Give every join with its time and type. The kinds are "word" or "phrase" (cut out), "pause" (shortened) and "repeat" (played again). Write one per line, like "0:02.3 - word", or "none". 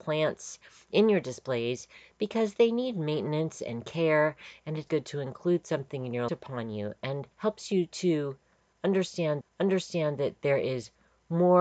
0:04.9 - word
0:06.3 - phrase
0:07.3 - pause
0:09.4 - repeat